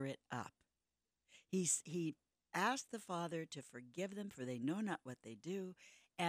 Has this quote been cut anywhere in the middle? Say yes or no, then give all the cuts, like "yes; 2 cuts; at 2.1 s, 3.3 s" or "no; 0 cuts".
no; 0 cuts